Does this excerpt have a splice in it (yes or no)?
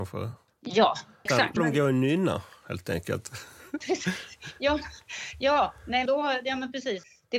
yes